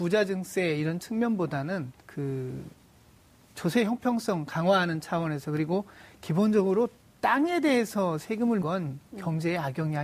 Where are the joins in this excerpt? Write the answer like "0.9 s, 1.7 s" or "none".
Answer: 2.0 s, 8.6 s